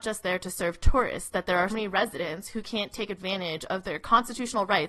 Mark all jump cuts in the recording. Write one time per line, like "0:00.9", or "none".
0:01.7